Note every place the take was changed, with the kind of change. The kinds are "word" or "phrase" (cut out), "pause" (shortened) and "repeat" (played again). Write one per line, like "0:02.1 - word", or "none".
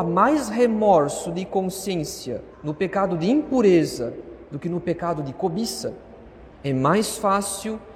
0:02.5 - pause
0:06.5 - pause